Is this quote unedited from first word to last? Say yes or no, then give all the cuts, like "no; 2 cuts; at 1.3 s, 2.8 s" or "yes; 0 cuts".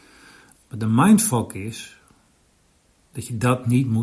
yes; 0 cuts